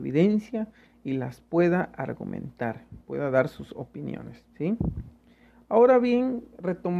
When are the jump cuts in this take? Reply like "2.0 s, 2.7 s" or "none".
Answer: 4.5 s